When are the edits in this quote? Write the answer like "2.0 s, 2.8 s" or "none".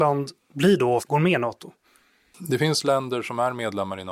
1.0 s